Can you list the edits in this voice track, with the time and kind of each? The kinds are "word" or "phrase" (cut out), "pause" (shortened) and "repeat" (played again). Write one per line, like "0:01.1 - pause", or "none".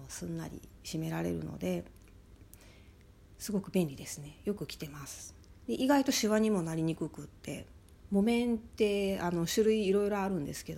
none